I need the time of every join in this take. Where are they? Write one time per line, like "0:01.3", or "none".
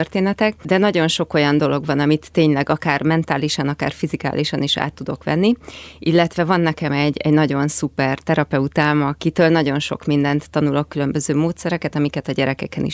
none